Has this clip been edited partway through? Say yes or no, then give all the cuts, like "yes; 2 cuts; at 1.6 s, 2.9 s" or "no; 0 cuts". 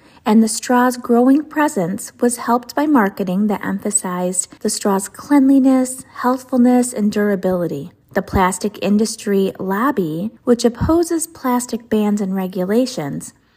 yes; 3 cuts; at 4.6 s, 8.0 s, 10.4 s